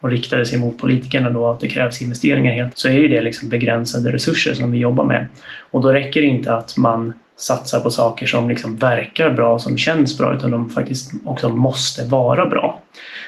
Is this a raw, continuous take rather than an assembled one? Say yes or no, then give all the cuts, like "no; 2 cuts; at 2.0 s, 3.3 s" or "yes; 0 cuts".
no; 1 cut; at 2.7 s